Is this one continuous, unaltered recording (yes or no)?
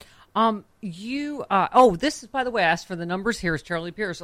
yes